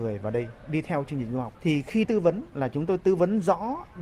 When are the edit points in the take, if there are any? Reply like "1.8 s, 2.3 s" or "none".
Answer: 2.0 s